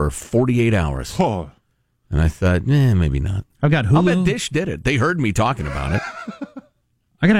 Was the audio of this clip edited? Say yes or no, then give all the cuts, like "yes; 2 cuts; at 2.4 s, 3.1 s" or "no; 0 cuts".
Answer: no; 0 cuts